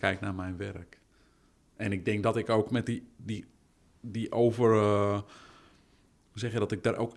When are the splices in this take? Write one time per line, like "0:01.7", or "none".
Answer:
none

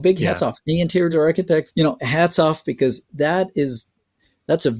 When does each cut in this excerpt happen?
0:01.1
0:01.7

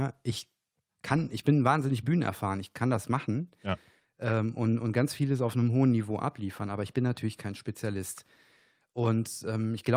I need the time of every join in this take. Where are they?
none

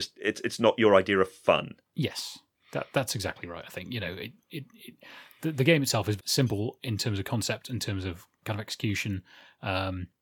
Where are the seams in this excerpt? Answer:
0:06.2

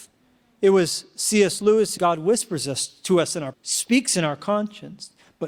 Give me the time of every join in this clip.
0:02.0
0:03.5

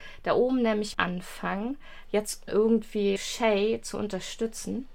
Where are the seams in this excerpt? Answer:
0:00.9
0:02.5
0:03.2

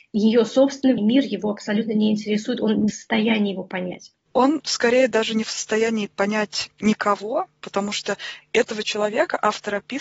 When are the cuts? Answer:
0:01.0
0:02.9

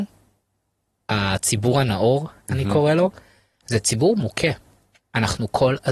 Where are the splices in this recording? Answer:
none

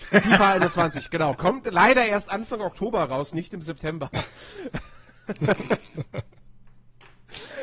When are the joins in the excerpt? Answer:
none

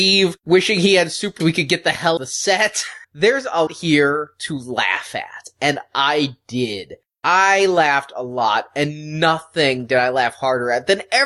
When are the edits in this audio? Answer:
0:01.4
0:02.2
0:03.0
0:03.7

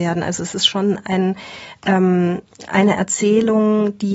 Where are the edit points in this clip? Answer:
none

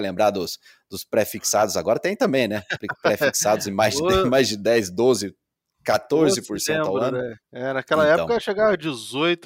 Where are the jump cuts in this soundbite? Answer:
0:07.4

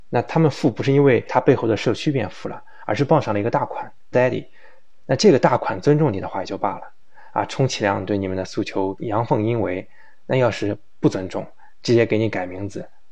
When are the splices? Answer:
0:04.1

